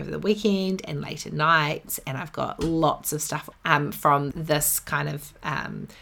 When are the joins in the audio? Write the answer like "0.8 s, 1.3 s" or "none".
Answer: 3.5 s, 4.3 s